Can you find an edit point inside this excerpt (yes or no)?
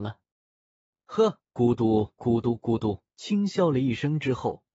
yes